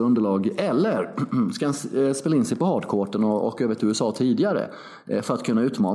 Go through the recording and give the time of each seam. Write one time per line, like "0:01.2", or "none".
none